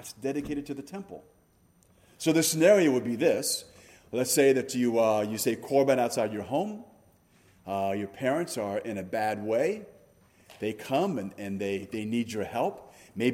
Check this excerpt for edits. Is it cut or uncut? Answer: uncut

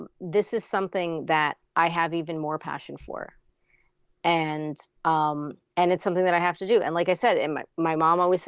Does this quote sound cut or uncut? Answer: uncut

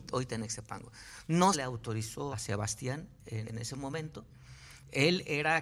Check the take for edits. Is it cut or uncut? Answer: cut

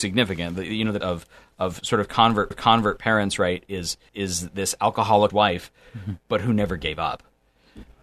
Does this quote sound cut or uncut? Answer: cut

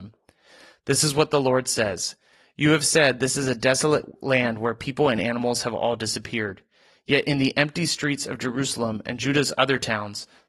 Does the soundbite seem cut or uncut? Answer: uncut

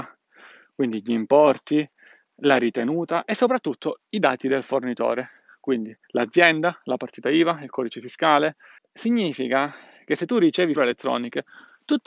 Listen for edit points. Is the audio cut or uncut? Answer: cut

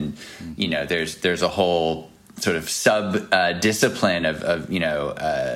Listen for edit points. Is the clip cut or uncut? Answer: uncut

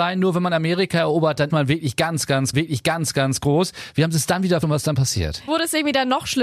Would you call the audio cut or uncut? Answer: cut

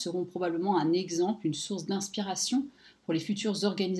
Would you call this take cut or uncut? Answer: uncut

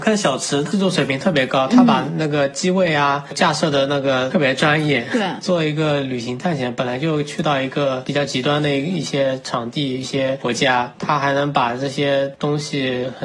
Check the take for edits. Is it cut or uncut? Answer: uncut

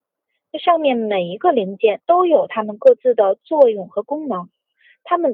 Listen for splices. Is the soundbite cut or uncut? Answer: cut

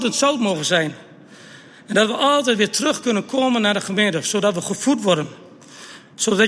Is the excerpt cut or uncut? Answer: uncut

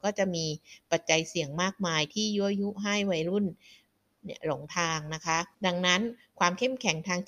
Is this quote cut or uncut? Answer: cut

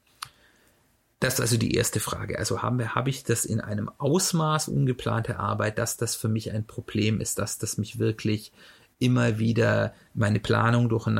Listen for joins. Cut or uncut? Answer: uncut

